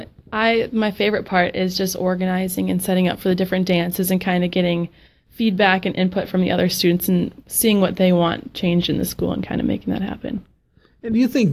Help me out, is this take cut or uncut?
uncut